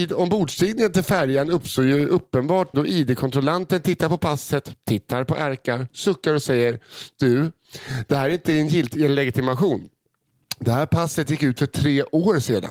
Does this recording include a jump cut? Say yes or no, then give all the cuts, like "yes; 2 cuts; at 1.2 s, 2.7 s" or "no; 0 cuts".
yes; 1 cut; at 2.7 s